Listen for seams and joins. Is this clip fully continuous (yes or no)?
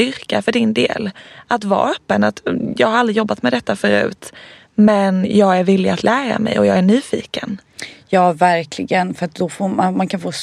yes